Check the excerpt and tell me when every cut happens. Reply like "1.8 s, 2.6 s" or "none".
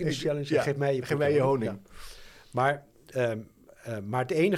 none